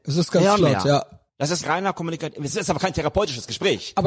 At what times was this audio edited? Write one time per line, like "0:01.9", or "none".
0:01.3
0:01.6